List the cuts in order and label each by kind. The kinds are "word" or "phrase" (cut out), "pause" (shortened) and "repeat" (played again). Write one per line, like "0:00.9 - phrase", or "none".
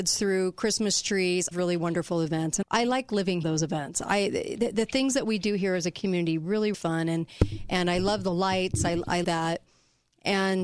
0:01.5 - phrase
0:02.6 - word
0:03.4 - phrase
0:06.7 - word
0:09.2 - phrase